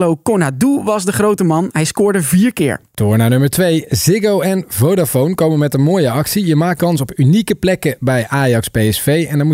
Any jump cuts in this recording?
yes; 2 cuts; at 2.9 s, 6.8 s

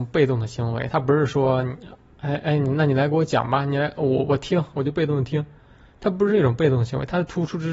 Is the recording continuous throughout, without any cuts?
yes; 0 cuts

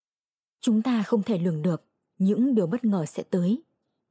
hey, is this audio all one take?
yes; 0 cuts

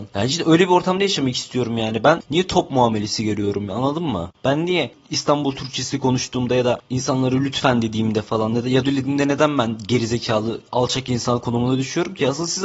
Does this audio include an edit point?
yes; 2 cuts; at 8.8 s, 10.7 s

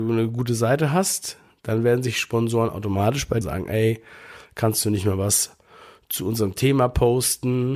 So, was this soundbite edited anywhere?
yes; 1 cut; at 3.4 s

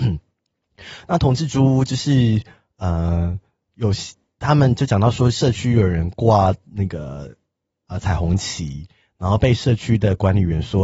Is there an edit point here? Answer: no; 0 cuts

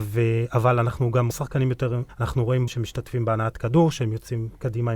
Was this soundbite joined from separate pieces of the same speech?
yes; 3 cuts; at 1.3 s, 2.1 s, 2.7 s

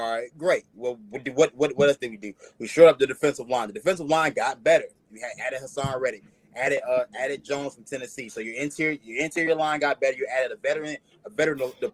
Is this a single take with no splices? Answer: yes; 0 cuts

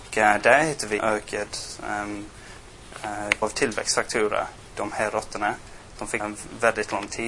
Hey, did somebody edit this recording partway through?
yes; 4 cuts; at 1.0 s, 3.4 s, 4.7 s, 6.2 s

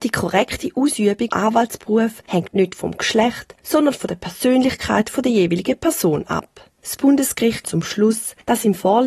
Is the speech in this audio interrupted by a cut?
yes; 2 cuts; at 1.3 s, 7.6 s

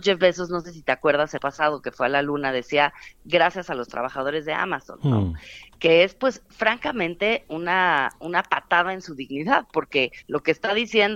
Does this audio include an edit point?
yes; 2 cuts; at 1.4 s, 10.2 s

